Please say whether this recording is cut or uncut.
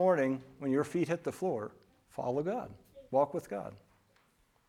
cut